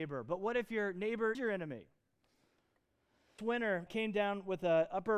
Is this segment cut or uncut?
cut